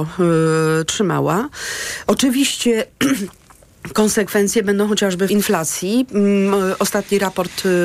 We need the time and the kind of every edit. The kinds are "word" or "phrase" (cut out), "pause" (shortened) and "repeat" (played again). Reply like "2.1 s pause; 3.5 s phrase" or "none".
5.3 s word